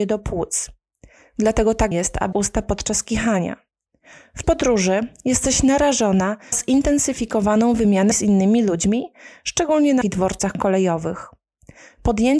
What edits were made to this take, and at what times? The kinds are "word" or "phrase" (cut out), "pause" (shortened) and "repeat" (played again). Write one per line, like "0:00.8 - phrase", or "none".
0:01.9 - word
0:02.3 - word
0:04.4 - word
0:06.5 - word
0:08.1 - word
0:10.0 - word